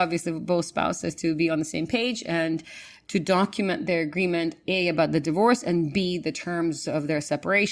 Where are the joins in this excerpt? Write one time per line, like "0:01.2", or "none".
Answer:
none